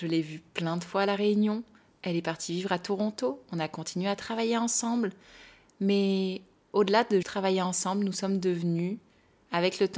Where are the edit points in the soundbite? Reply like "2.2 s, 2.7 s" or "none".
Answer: 7.2 s